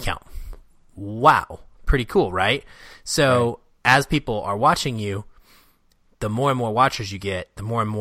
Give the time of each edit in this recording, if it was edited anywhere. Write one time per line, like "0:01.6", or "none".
none